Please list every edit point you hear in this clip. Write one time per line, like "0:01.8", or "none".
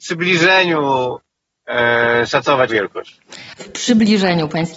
0:02.7
0:03.6